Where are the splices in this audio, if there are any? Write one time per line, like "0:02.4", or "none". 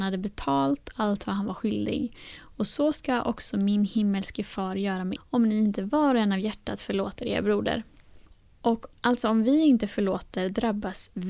0:05.2